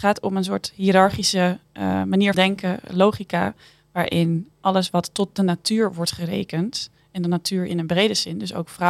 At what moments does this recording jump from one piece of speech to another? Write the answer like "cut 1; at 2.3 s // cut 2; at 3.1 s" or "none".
cut 1; at 2.3 s // cut 2; at 4.5 s